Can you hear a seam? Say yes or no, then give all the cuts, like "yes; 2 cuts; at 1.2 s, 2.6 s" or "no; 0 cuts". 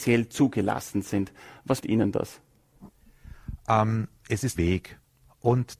yes; 2 cuts; at 1.8 s, 4.6 s